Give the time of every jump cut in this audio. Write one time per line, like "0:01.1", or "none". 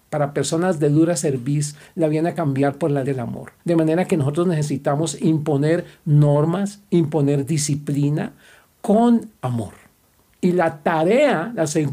0:03.0
0:03.6
0:09.4